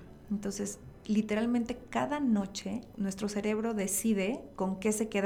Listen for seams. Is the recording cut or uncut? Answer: cut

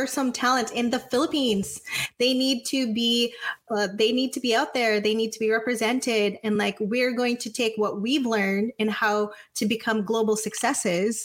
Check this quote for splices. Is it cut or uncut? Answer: uncut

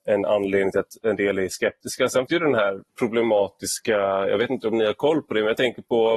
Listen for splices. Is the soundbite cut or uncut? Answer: cut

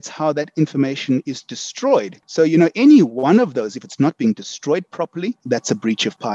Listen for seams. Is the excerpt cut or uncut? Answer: uncut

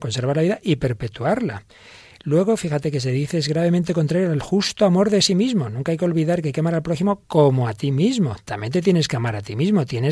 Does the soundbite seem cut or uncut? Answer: uncut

